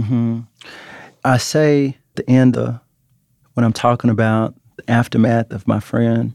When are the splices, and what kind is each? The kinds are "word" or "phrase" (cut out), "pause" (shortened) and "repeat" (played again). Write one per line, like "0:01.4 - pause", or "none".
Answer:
0:02.1 - word
0:02.5 - word
0:03.4 - word